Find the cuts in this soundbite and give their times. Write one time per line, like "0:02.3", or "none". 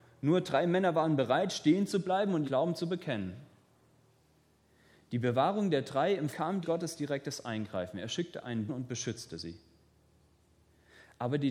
0:02.4
0:06.3
0:06.6
0:08.7